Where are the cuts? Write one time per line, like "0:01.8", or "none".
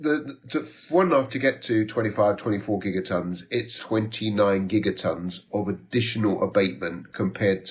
0:01.3
0:03.8

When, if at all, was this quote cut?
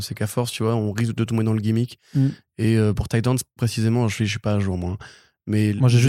none

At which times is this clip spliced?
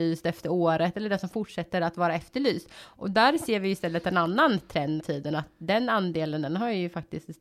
0:05.0

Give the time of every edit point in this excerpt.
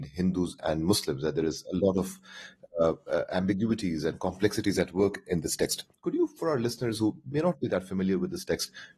none

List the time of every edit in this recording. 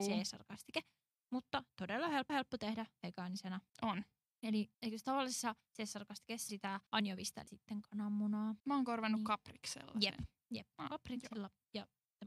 0:02.3
0:03.7
0:04.7
0:06.5
0:06.9
0:07.5
0:08.6

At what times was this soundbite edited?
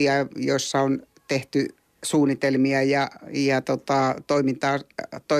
none

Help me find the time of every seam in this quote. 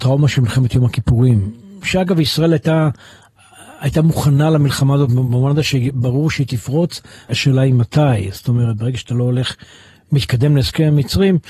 none

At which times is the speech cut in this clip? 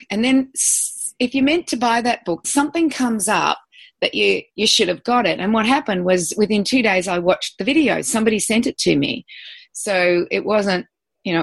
0:02.4

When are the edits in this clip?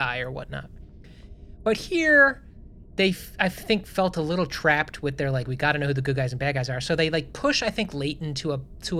none

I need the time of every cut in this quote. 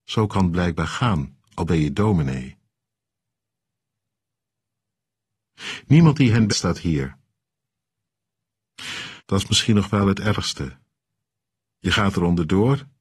0:01.4
0:06.5
0:09.2

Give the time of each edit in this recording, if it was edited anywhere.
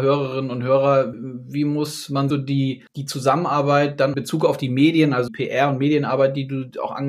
0:01.1
0:02.3
0:02.9
0:04.1
0:05.3

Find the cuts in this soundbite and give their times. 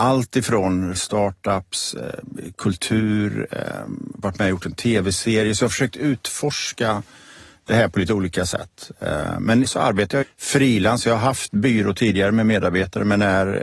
0:01.0
0:09.6
0:10.2

